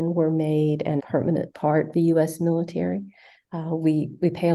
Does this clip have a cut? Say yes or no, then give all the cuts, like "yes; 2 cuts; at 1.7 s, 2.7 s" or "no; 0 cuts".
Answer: yes; 2 cuts; at 1.0 s, 1.9 s